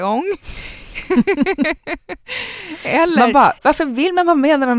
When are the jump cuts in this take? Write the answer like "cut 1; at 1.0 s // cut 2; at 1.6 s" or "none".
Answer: cut 1; at 3.6 s